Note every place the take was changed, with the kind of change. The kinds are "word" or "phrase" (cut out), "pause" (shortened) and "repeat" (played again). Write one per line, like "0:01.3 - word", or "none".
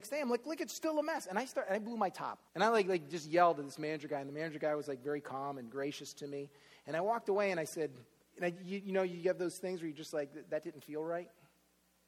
0:02.5 - pause
0:08.2 - pause